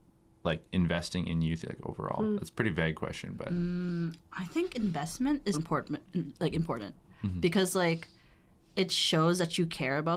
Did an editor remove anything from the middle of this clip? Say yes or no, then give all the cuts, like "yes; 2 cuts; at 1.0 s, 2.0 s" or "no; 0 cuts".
yes; 2 cuts; at 1.6 s, 5.5 s